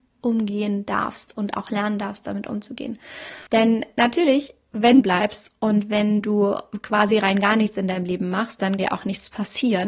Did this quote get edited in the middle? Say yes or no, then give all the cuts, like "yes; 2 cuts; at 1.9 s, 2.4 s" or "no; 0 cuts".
yes; 3 cuts; at 3.5 s, 5.0 s, 8.8 s